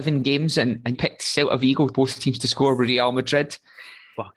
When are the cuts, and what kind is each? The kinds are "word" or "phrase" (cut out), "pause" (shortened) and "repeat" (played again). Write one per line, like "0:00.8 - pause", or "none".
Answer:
0:00.9 - word
0:01.9 - phrase